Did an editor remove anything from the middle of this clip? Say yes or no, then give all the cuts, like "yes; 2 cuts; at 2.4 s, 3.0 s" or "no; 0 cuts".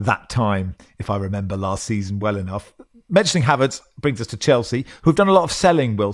no; 0 cuts